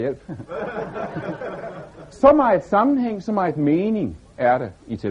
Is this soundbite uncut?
yes; 0 cuts

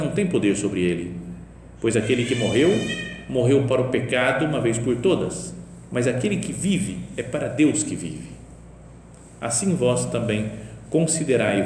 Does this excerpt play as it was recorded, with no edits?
yes; 0 cuts

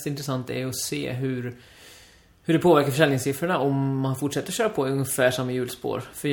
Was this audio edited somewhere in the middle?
no; 0 cuts

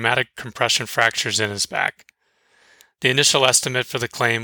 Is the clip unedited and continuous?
yes; 0 cuts

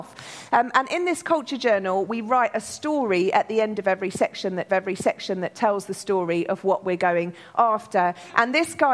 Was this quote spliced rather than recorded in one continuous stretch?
yes; 1 cut; at 4.7 s

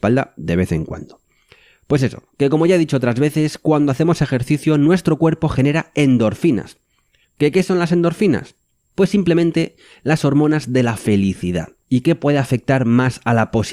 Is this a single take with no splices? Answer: yes; 0 cuts

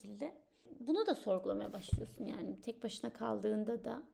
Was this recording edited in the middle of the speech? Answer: no; 0 cuts

